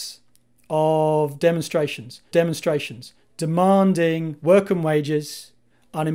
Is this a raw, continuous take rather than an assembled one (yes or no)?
no